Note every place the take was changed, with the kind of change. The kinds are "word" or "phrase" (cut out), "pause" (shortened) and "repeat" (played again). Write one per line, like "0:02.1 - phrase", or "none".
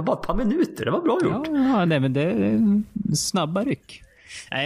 none

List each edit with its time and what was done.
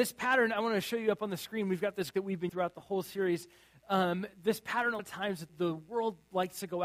0:02.1 - word
0:02.5 - word
0:05.0 - word
0:05.5 - word

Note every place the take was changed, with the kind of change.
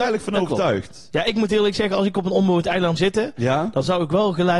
0:03.0 - word

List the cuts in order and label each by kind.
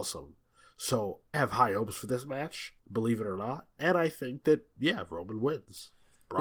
0:01.3 - word
0:02.8 - pause

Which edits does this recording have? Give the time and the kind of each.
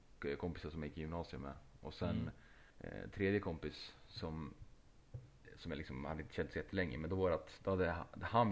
0:02.7 - pause

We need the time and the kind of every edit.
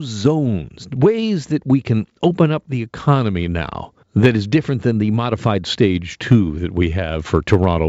0:04.0 - pause

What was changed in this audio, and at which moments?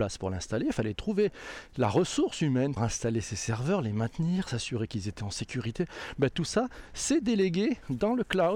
0:02.8 - phrase

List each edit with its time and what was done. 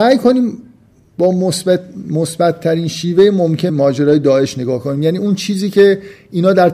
0:03.7 - word

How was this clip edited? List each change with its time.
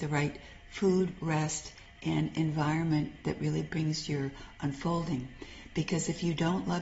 none

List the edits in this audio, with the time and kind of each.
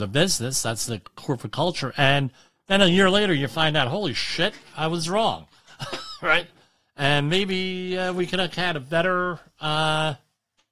none

